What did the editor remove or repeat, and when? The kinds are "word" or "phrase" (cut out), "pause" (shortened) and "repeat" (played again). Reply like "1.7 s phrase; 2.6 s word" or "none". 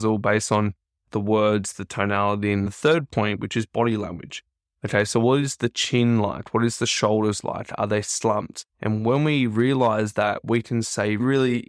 2.7 s word; 8.7 s pause